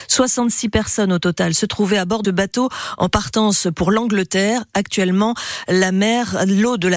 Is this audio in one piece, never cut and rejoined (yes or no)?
no